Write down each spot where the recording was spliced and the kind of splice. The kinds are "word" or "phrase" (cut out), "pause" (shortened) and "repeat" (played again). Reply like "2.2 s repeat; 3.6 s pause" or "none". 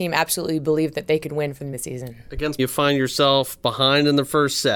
1.7 s word; 2.6 s word